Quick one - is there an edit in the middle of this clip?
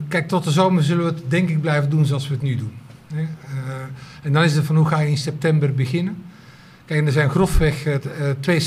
yes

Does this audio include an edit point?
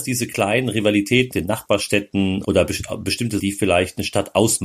yes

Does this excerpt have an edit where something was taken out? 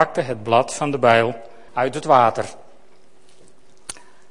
yes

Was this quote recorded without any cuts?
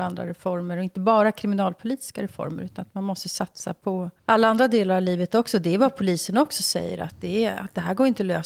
no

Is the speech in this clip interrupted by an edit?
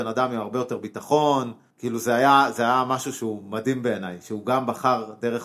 no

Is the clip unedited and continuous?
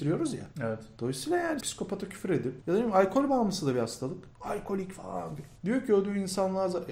no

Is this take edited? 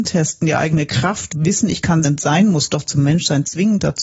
yes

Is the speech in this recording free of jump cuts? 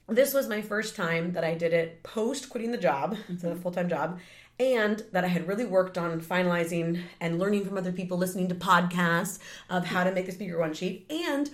yes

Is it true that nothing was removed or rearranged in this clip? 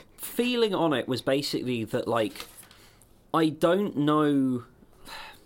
yes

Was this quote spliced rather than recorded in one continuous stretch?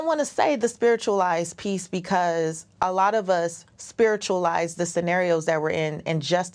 no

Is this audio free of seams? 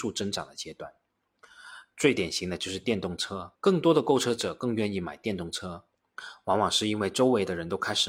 no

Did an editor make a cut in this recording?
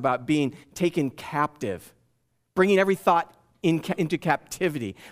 no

